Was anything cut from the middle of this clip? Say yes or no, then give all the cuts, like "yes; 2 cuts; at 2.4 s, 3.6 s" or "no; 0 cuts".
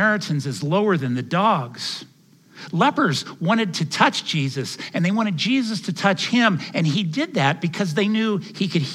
no; 0 cuts